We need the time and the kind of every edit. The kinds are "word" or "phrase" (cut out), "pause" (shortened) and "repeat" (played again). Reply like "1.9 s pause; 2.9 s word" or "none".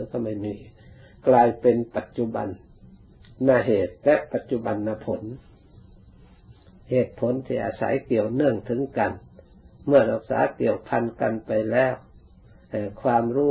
none